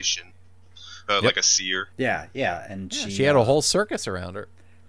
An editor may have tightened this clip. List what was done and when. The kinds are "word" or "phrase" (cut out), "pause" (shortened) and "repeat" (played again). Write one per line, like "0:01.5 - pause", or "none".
none